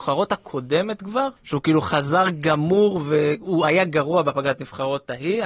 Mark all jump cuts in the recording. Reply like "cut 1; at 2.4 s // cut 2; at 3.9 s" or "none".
cut 1; at 1.4 s